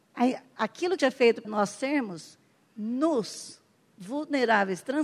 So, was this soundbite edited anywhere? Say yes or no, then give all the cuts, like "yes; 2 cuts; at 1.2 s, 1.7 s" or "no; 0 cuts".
yes; 3 cuts; at 1.0 s, 1.4 s, 3.8 s